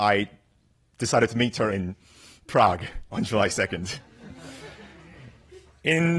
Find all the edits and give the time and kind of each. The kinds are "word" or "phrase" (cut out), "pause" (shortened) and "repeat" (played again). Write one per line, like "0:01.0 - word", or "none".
0:01.7 - word